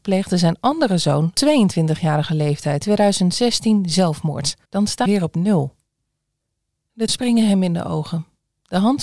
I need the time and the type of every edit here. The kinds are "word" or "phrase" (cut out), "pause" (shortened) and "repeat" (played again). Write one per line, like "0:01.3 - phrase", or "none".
0:01.3 - phrase
0:02.8 - word
0:04.6 - pause
0:05.1 - word
0:07.1 - word